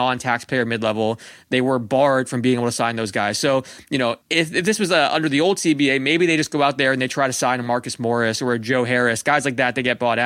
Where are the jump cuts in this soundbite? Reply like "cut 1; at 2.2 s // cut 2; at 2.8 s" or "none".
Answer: cut 1; at 4.2 s